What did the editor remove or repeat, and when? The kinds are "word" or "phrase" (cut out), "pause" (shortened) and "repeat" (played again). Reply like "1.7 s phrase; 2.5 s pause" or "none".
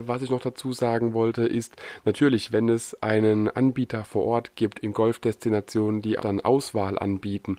6.2 s word